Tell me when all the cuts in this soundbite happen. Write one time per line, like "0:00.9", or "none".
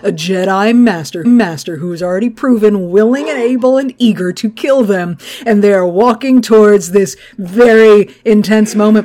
0:01.2